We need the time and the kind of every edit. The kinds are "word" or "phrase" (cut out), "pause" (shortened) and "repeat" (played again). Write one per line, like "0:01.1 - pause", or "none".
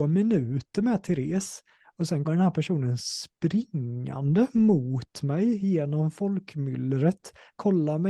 0:02.2 - word